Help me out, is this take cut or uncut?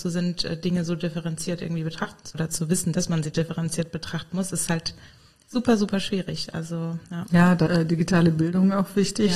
cut